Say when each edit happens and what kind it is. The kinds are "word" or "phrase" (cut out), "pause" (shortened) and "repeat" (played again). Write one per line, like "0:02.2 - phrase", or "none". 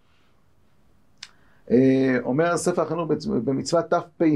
none